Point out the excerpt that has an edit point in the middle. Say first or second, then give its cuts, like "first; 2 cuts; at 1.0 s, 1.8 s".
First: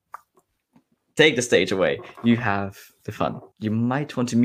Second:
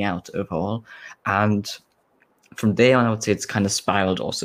first; 1 cut; at 3.5 s